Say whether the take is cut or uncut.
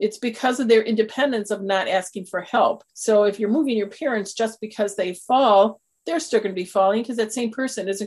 cut